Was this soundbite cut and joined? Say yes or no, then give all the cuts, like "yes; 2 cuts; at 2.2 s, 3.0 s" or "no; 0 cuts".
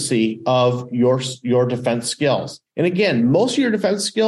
yes; 1 cut; at 2.7 s